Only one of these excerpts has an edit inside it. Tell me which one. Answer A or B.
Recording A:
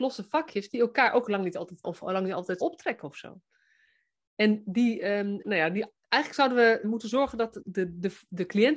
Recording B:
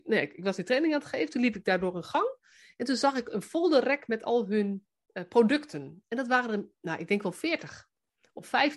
A